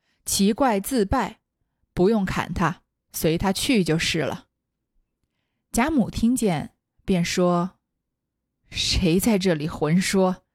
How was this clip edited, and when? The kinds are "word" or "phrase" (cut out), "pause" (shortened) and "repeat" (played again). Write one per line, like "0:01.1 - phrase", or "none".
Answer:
none